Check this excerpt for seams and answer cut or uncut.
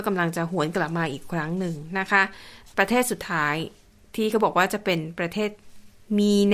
uncut